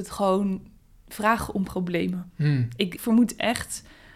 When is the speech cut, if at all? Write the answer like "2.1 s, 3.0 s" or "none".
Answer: 3.0 s

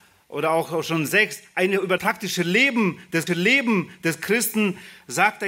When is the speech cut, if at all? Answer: 2.0 s, 3.3 s

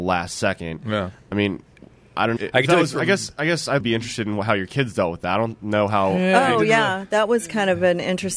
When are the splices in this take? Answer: 2.4 s, 3.8 s

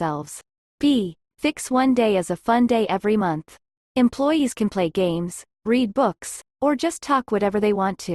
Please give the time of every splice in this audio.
none

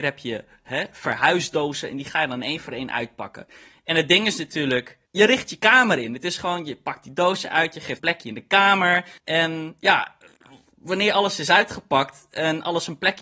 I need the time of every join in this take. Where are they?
5.1 s, 8.0 s, 9.2 s

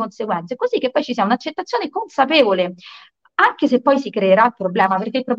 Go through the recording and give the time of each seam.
none

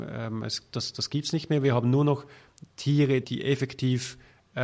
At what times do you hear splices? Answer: 3.2 s

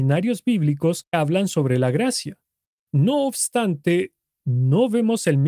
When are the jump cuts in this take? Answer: 1.1 s

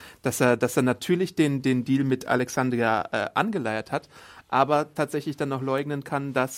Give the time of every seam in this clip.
none

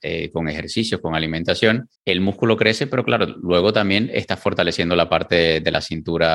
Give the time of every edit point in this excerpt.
2.0 s

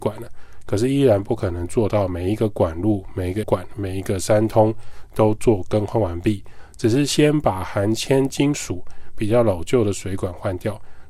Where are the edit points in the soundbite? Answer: 3.4 s

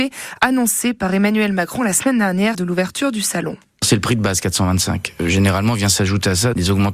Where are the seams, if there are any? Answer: 2.5 s

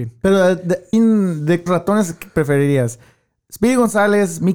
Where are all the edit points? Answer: 0.9 s, 1.7 s

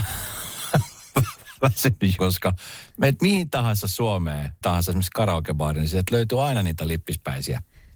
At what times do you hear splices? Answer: 2.2 s, 4.6 s

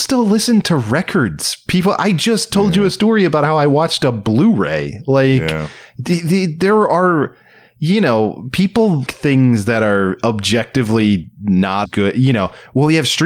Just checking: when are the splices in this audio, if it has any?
9.1 s, 11.8 s

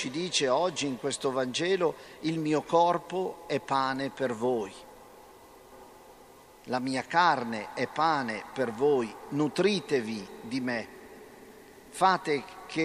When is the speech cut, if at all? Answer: none

